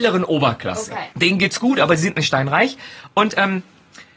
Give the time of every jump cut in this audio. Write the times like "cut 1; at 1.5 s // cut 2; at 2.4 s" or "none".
cut 1; at 1.1 s